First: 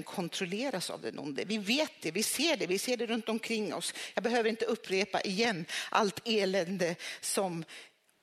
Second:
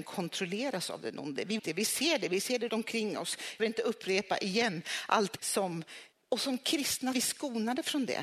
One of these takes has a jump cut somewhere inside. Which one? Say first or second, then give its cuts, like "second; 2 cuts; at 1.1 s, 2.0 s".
second; 6 cuts; at 1.6 s, 2.7 s, 3.6 s, 5.4 s, 6.1 s, 7.1 s